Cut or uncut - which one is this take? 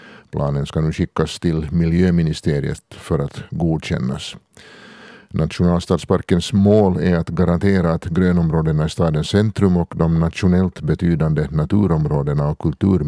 uncut